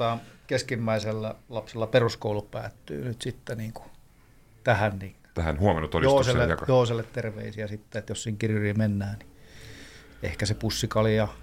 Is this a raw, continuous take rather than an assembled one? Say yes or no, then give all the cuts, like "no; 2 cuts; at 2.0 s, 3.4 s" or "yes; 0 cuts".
yes; 0 cuts